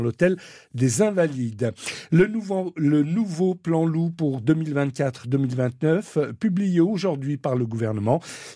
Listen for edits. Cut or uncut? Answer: uncut